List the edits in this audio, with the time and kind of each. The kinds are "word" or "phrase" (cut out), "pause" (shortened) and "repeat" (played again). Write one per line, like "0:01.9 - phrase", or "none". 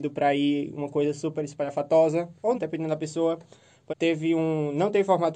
0:02.5 - word
0:03.9 - word